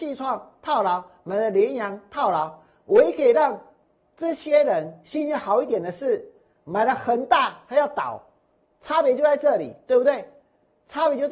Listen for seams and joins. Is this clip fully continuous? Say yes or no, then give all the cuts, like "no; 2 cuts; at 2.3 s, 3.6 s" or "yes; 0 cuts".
yes; 0 cuts